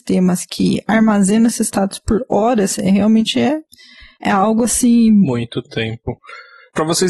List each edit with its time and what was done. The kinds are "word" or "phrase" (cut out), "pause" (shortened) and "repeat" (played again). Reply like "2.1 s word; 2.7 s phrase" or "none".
none